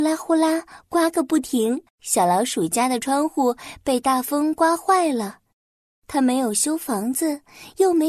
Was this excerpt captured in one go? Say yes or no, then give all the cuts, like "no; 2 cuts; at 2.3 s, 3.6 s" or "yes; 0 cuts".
no; 1 cut; at 1.9 s